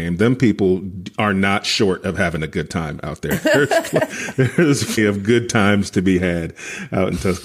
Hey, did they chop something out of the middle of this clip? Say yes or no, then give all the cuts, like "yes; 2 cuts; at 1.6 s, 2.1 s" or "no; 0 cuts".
yes; 1 cut; at 5.0 s